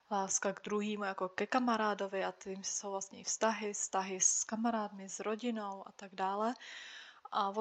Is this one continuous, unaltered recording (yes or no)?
yes